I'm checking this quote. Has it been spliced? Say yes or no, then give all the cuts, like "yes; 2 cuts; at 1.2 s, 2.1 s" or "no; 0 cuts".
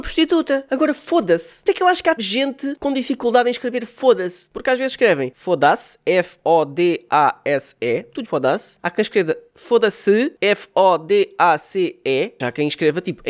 yes; 4 cuts; at 1.7 s, 2.2 s, 8.3 s, 12.4 s